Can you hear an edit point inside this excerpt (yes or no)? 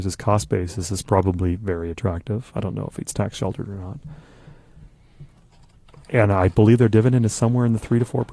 no